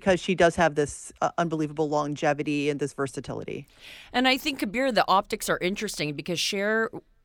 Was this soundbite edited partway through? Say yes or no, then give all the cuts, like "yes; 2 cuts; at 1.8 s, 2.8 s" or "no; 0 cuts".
no; 0 cuts